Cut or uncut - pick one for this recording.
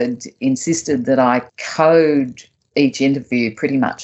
cut